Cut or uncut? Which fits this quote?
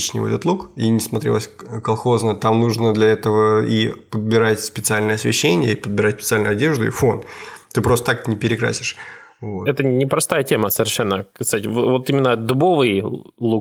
uncut